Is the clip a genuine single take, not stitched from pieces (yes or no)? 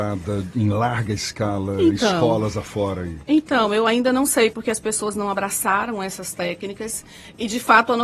yes